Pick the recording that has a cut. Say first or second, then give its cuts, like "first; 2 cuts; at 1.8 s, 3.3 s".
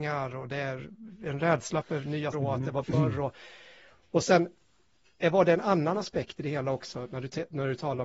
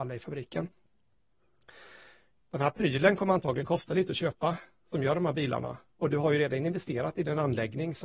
first; 2 cuts; at 2.3 s, 2.8 s